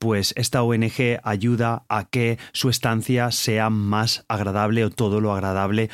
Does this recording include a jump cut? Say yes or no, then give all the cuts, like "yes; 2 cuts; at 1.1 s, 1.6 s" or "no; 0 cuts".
no; 0 cuts